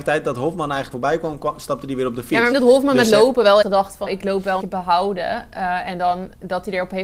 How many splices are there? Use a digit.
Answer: 5